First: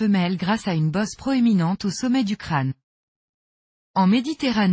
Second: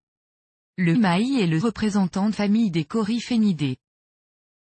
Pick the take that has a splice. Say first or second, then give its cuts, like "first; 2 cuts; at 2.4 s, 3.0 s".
second; 3 cuts; at 0.9 s, 1.6 s, 2.3 s